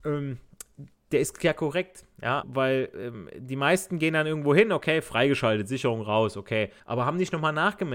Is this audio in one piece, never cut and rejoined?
no; 2 cuts; at 2.4 s, 6.8 s

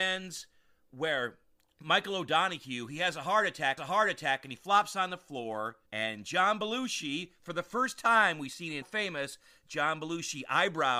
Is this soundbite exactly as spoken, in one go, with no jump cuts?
no; 4 cuts; at 1.5 s, 3.8 s, 5.9 s, 8.8 s

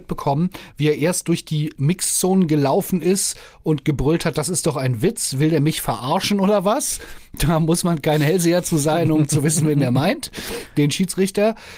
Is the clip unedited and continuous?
yes; 0 cuts

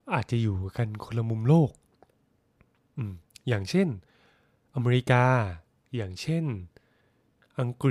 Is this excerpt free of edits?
yes; 0 cuts

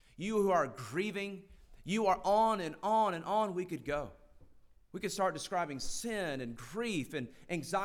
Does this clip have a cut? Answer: no; 0 cuts

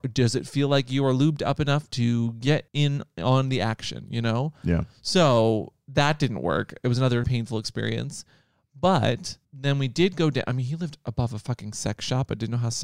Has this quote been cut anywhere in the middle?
yes; 3 cuts; at 2.7 s, 7.2 s, 9.4 s

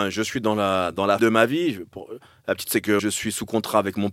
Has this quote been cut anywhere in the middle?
yes; 3 cuts; at 1.2 s, 2.6 s, 3.0 s

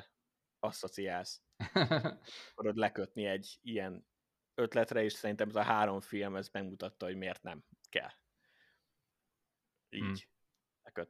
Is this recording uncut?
yes; 0 cuts

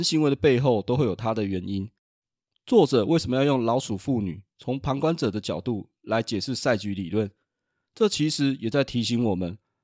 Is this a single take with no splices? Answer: yes; 0 cuts

